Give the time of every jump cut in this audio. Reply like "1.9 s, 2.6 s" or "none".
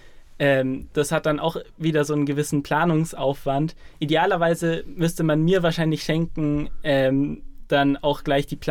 none